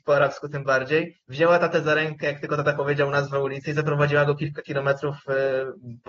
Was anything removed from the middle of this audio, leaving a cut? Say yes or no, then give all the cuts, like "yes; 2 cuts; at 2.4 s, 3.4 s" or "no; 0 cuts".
yes; 1 cut; at 1.2 s